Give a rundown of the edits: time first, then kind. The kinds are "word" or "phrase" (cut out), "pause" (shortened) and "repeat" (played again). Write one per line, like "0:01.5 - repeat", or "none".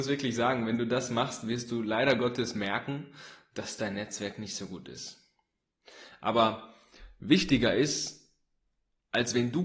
none